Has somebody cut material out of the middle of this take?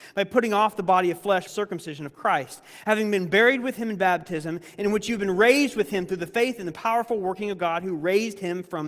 yes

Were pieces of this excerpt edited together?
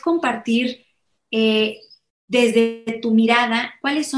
no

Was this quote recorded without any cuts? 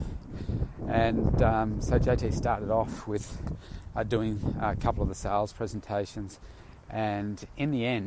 yes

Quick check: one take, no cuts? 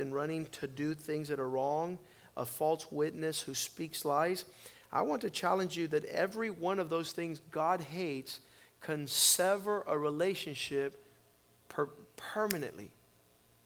yes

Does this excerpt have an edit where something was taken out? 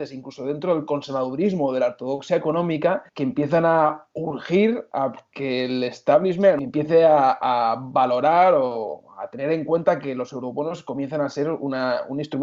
yes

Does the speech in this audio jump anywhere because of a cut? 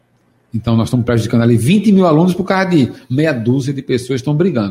no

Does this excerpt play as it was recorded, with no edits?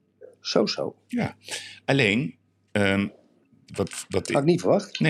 yes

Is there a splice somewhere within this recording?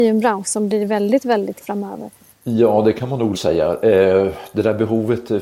yes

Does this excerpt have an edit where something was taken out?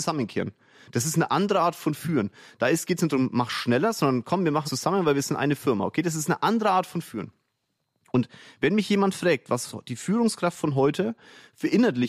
yes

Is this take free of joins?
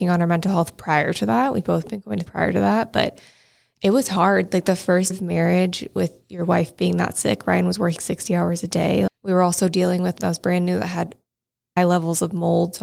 no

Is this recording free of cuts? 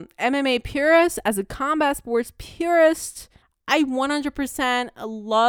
no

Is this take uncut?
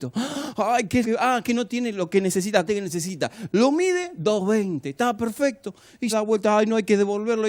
no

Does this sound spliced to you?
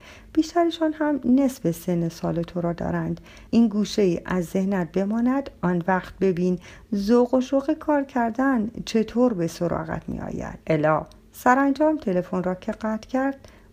yes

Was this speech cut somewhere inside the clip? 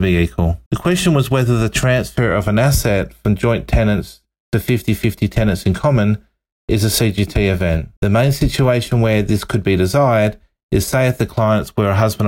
no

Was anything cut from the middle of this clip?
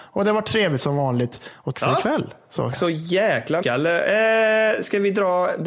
yes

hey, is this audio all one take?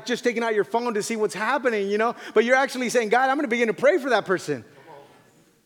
yes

